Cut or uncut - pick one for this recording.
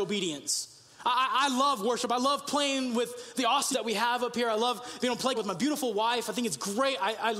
cut